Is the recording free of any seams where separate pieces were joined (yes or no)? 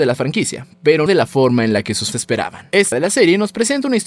no